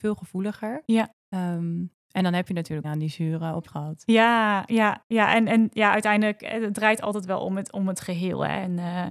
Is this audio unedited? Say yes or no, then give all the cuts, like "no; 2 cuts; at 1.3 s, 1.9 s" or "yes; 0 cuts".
no; 3 cuts; at 1.2 s, 2.8 s, 3.7 s